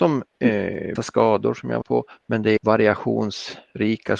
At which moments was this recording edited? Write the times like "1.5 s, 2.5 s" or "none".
1.0 s, 1.8 s, 2.6 s